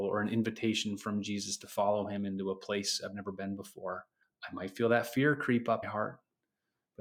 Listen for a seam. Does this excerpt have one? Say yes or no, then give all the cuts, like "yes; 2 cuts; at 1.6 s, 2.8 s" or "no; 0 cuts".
yes; 2 cuts; at 4.2 s, 5.8 s